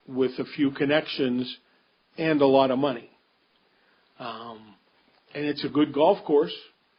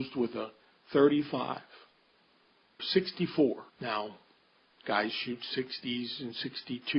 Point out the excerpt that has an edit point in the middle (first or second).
second